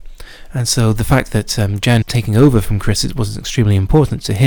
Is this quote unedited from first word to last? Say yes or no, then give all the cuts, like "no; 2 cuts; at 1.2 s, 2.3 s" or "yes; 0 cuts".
no; 1 cut; at 2.0 s